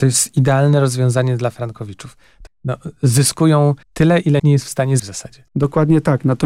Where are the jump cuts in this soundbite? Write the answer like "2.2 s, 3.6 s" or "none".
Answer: 2.5 s, 3.8 s, 4.4 s, 5.0 s, 5.5 s